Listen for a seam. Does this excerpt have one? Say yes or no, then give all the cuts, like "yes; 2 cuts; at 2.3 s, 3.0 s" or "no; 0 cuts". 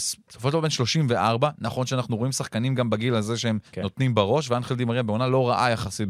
yes; 1 cut; at 3.7 s